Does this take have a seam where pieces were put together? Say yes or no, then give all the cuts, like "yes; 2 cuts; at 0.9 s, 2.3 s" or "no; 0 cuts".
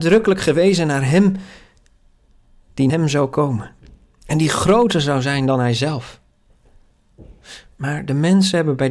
yes; 1 cut; at 2.9 s